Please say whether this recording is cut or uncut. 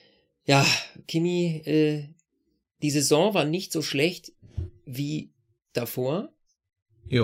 uncut